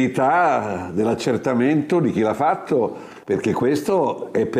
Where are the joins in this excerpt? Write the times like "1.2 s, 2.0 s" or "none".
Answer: 3.2 s